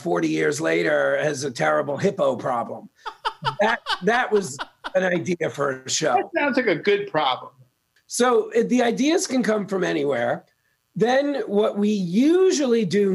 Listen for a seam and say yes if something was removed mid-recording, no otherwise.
no